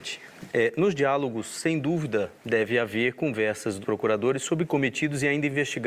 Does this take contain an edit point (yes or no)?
yes